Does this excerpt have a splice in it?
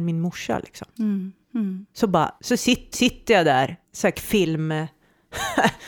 yes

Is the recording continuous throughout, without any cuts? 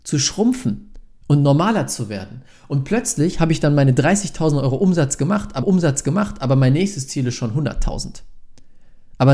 no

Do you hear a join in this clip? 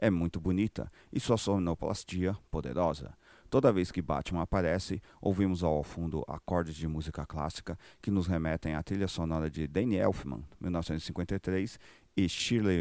no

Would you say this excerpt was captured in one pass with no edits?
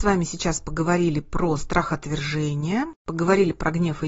yes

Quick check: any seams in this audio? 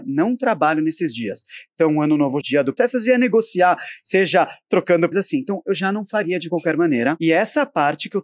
yes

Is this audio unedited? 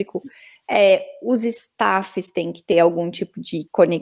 yes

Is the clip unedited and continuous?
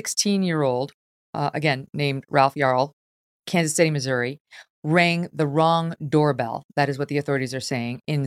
yes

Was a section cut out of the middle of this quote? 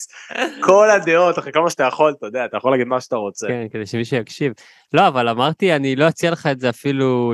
no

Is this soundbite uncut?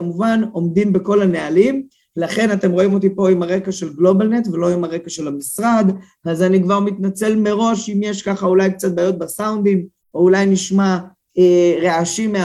yes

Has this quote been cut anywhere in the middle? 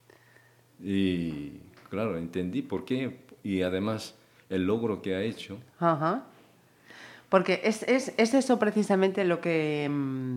no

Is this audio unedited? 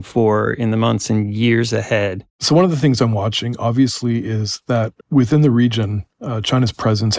no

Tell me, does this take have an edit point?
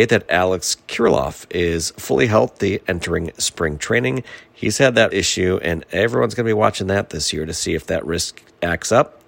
yes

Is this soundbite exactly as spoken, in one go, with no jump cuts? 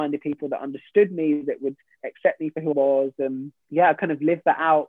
no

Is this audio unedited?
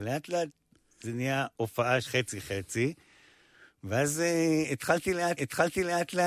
no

